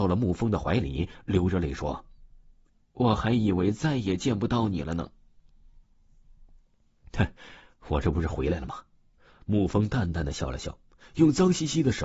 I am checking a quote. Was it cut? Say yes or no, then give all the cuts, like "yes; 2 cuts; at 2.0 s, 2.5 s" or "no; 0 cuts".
no; 0 cuts